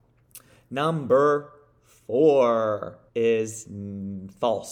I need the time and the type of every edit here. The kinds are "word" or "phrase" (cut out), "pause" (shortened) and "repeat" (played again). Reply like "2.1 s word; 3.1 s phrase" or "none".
3.1 s pause